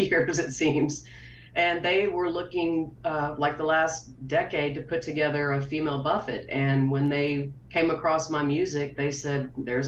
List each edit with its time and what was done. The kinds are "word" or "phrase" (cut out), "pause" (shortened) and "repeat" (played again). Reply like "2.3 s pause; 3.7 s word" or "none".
7.6 s pause